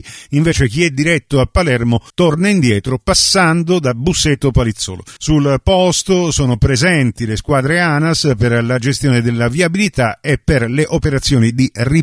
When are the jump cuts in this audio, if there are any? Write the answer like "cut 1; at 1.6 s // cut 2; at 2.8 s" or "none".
cut 1; at 2.1 s // cut 2; at 5.2 s